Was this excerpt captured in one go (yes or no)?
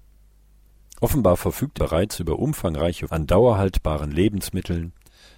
no